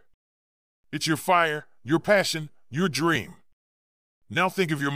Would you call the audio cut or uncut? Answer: uncut